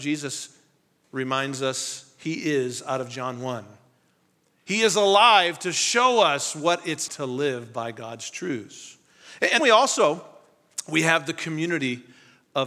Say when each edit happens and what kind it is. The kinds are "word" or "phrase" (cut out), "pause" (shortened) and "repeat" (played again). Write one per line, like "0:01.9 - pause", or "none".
0:07.1 - word
0:09.6 - word